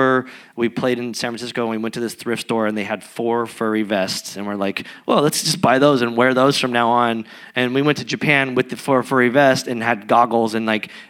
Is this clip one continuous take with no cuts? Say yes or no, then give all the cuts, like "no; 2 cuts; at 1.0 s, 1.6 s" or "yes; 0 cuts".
yes; 0 cuts